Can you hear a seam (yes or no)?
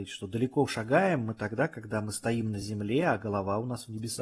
no